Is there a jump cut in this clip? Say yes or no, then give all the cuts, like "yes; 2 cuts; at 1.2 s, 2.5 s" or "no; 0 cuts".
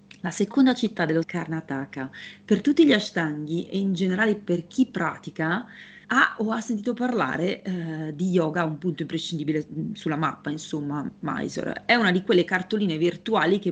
yes; 2 cuts; at 1.2 s, 6.0 s